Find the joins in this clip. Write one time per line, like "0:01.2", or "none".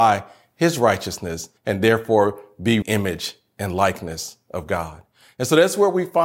0:01.6
0:02.8